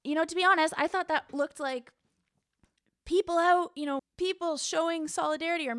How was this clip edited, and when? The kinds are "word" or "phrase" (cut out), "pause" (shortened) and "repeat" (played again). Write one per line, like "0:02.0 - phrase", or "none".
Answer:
0:04.0 - word